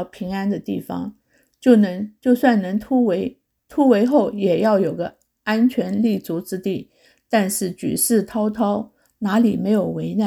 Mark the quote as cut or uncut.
uncut